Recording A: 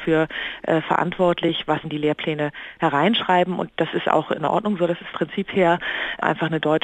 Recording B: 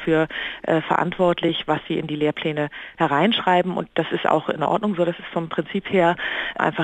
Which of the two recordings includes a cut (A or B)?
A